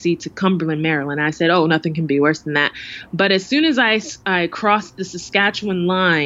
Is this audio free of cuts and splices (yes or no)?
yes